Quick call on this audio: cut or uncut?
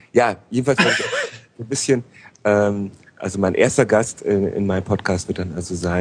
uncut